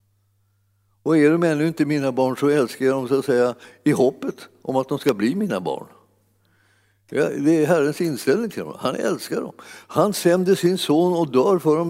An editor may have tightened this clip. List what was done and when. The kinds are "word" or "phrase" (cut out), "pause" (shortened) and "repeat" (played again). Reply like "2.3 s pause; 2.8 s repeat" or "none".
none